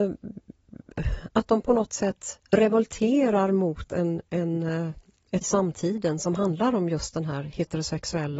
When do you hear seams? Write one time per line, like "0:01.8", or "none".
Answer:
0:02.4
0:05.4